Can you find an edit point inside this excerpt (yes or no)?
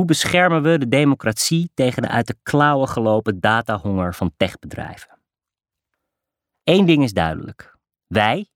no